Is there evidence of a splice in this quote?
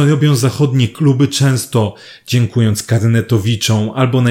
no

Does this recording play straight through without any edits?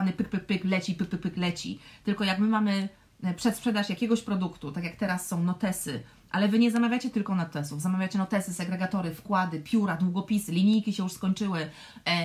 yes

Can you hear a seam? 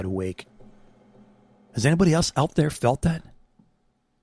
no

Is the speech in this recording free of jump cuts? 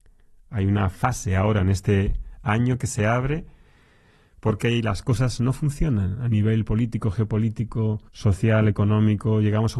no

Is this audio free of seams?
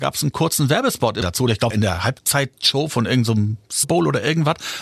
no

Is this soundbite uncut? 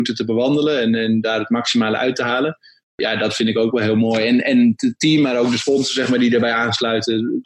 yes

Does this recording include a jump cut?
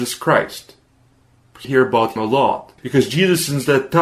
yes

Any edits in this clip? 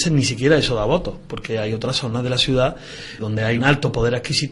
yes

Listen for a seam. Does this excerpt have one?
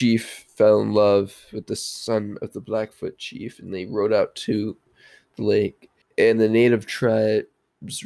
no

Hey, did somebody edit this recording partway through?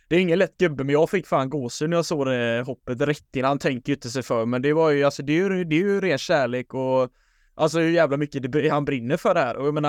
no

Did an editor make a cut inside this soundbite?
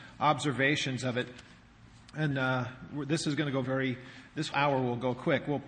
yes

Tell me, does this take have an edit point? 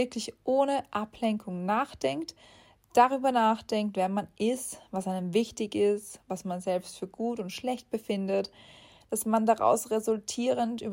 no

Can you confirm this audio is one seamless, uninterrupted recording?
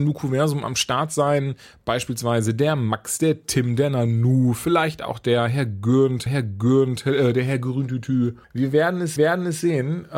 no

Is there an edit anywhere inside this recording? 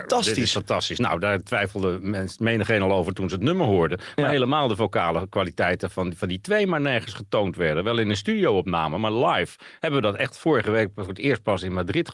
no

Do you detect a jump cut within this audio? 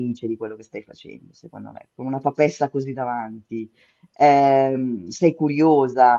no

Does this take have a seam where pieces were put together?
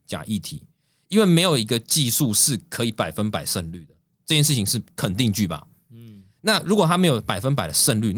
no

